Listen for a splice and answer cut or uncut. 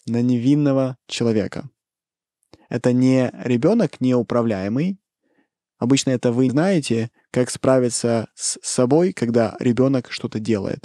cut